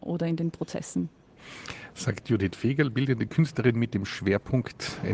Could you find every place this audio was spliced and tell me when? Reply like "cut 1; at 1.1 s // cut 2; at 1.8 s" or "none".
none